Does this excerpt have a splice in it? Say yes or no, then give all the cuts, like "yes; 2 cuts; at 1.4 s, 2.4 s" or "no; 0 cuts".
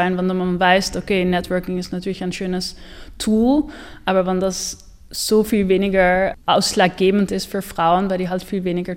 yes; 1 cut; at 6.4 s